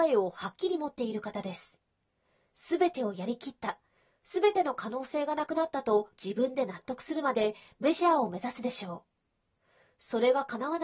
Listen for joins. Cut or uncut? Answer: uncut